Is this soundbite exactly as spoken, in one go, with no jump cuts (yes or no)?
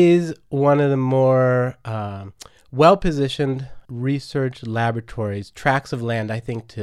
no